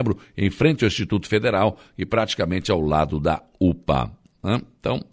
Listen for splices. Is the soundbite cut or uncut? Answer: uncut